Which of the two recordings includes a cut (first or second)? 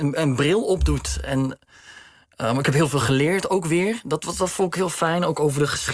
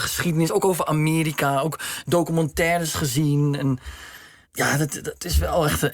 second